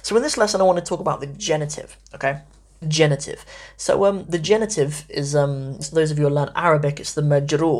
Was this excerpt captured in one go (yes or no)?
no